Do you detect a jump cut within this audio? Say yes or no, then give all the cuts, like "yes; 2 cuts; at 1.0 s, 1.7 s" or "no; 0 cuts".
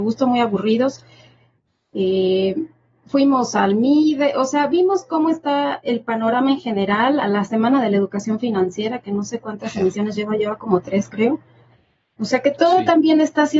no; 0 cuts